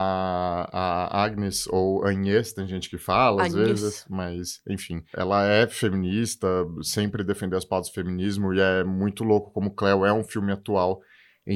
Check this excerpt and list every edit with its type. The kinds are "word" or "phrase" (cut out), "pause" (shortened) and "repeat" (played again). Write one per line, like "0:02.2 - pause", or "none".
none